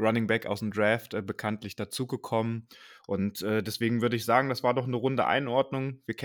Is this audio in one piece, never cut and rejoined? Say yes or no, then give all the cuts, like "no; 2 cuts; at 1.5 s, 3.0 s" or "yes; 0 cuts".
yes; 0 cuts